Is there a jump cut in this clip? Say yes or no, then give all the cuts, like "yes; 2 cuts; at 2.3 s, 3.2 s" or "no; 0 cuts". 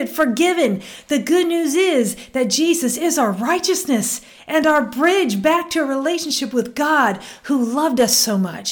no; 0 cuts